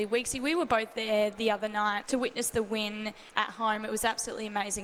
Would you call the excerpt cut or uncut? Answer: cut